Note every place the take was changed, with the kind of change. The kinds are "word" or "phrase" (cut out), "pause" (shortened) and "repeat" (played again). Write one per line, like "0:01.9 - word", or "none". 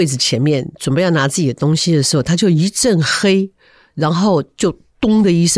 none